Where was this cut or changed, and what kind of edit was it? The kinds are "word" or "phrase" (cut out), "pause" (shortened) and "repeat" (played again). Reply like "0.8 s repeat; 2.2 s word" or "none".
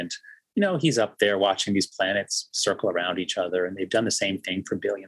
none